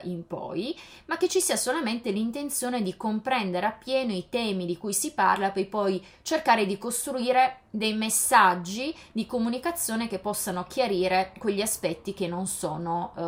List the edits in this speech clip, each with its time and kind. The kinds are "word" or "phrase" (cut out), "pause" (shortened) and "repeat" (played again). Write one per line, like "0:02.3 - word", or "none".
none